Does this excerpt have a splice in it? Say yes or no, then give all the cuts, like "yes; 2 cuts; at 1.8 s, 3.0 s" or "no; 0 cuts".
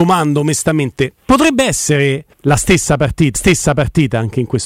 yes; 3 cuts; at 1.2 s, 2.3 s, 3.3 s